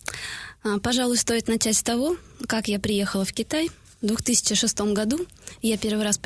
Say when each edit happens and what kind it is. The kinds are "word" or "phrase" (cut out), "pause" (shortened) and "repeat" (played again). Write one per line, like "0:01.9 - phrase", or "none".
none